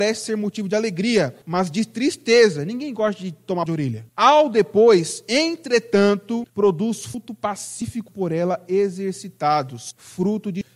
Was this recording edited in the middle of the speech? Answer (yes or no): yes